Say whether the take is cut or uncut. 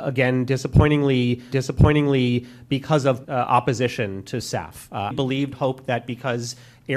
cut